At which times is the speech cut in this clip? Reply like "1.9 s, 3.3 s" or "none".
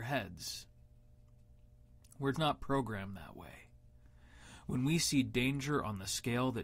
2.3 s